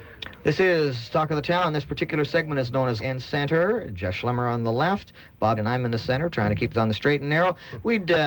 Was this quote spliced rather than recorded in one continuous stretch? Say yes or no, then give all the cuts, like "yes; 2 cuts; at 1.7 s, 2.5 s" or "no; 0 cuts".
yes; 3 cuts; at 3.0 s, 5.6 s, 6.7 s